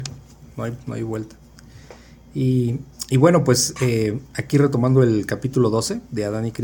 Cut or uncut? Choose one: uncut